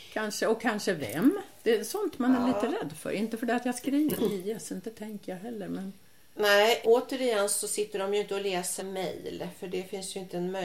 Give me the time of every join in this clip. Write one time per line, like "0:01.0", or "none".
0:04.2
0:06.8
0:08.8